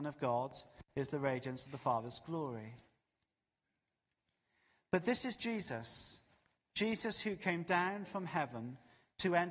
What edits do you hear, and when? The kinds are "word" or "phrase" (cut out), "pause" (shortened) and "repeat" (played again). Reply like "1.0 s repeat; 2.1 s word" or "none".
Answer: none